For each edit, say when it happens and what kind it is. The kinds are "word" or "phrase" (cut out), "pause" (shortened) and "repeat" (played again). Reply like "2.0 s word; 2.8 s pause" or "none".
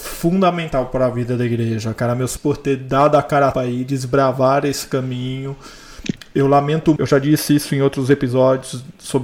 2.4 s word; 3.5 s word; 7.0 s word